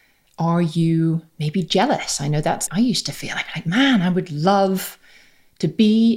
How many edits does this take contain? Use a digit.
1